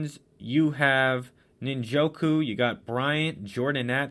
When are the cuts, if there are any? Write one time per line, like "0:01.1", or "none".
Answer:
none